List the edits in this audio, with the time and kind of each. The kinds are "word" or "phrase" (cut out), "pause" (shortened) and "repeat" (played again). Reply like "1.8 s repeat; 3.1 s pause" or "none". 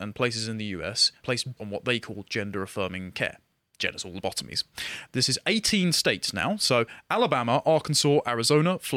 1.2 s word; 1.6 s word